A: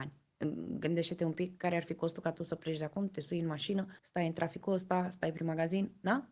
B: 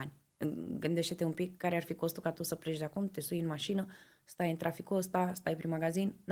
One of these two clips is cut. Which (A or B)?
A